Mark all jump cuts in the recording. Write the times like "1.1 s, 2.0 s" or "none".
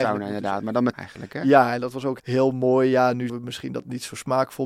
0.9 s, 2.2 s, 3.3 s